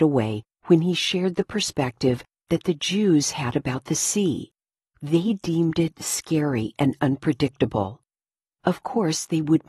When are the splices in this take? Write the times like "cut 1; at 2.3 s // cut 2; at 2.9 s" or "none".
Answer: none